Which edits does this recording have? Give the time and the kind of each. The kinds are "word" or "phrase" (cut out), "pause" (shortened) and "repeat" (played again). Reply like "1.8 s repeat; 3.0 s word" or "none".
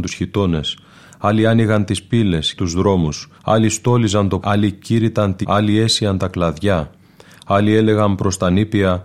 2.6 s phrase; 3.4 s pause; 4.4 s word; 5.4 s word